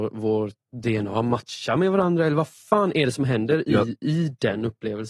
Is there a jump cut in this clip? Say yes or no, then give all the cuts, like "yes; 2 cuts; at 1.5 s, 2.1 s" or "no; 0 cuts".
no; 0 cuts